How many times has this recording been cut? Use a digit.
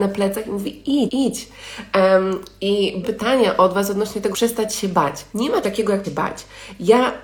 6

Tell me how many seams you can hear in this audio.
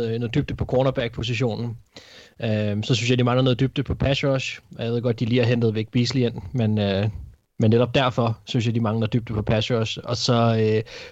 0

